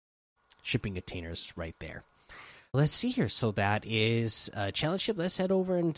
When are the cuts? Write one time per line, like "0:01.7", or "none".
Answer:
0:02.7